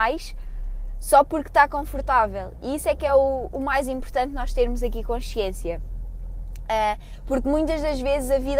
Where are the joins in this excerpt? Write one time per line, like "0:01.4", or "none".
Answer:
none